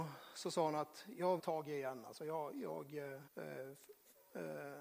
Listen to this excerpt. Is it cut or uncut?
cut